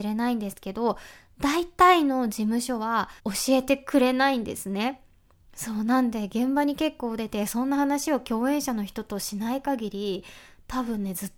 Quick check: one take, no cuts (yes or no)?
no